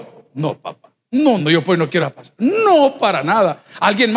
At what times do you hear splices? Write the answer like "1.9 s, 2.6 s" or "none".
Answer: 1.4 s, 2.0 s